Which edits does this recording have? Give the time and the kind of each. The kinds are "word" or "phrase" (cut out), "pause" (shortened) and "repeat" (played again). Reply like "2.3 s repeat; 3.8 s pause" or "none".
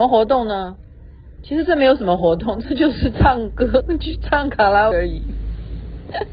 4.9 s word